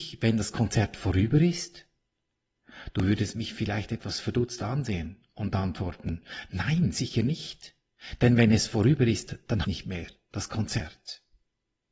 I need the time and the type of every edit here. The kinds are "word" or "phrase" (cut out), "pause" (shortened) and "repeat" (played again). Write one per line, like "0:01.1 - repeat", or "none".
0:09.6 - phrase